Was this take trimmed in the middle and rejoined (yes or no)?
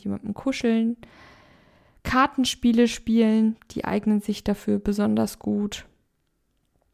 no